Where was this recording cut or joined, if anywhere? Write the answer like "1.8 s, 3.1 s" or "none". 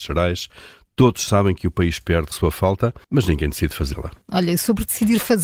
2.3 s, 3.0 s, 4.2 s

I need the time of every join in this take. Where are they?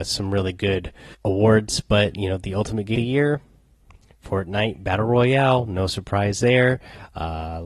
1.1 s, 2.9 s

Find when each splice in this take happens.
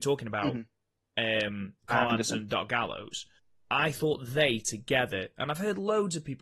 1.8 s, 3.4 s

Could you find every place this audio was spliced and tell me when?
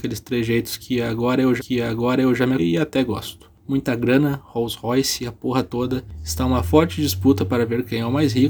1.6 s, 2.6 s

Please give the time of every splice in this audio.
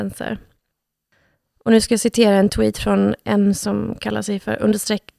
none

